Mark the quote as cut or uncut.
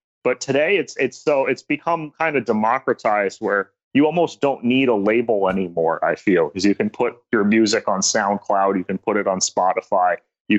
uncut